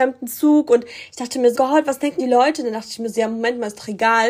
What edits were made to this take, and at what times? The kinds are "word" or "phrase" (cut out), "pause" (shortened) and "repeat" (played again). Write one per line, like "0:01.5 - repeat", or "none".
0:01.5 - word
0:02.2 - word